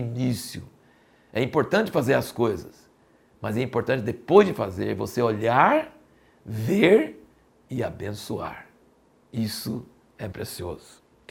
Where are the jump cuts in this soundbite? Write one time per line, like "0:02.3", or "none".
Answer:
0:10.3